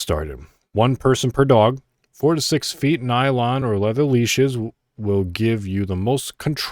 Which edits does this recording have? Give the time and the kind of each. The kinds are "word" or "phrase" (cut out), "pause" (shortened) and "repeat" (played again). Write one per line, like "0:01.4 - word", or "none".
none

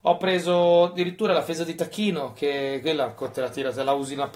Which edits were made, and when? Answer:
none

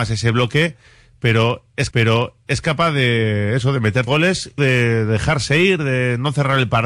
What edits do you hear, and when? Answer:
0:01.9 - repeat
0:04.1 - word
0:04.6 - word

